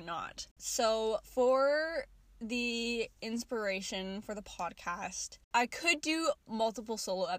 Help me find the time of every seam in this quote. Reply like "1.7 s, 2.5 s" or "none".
3.2 s, 5.4 s